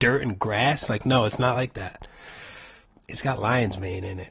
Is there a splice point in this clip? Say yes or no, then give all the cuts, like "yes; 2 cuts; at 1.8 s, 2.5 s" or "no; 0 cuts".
no; 0 cuts